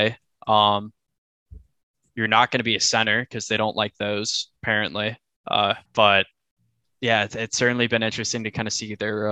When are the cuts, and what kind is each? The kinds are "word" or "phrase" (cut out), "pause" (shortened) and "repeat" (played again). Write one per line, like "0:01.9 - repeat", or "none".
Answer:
0:04.6 - pause
0:05.9 - pause